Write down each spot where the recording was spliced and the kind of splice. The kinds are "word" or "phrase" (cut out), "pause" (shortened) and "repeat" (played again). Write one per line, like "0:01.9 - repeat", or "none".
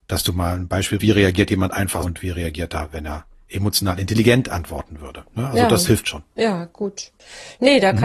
0:01.0 - word
0:02.0 - word
0:06.0 - word